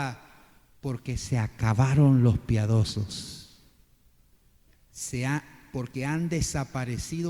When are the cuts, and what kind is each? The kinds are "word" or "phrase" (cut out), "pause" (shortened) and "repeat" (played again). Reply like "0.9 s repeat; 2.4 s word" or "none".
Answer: none